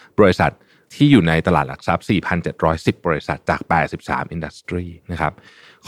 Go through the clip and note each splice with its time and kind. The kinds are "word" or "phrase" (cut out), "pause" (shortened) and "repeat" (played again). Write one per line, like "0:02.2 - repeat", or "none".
0:05.0 - pause